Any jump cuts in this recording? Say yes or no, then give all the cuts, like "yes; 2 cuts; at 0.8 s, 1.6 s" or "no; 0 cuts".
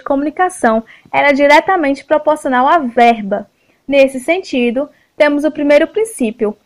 no; 0 cuts